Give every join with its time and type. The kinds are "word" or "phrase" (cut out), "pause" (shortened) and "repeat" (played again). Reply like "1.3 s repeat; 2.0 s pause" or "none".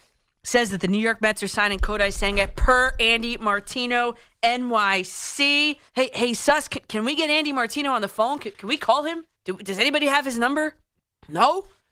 5.9 s pause; 9.3 s pause; 11.0 s pause